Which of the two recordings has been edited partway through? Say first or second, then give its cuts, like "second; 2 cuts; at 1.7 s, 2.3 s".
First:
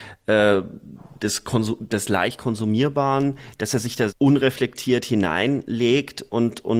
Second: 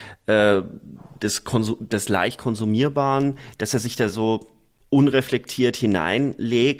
first; 1 cut; at 4.1 s